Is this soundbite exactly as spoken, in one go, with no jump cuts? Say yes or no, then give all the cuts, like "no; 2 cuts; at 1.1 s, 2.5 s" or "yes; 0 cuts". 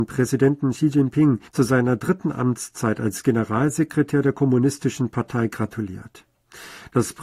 no; 1 cut; at 1.5 s